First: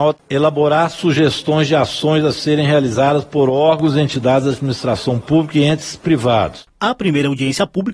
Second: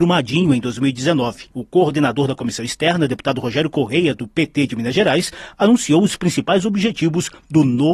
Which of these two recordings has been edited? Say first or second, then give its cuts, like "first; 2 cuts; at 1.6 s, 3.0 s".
second; 1 cut; at 1.5 s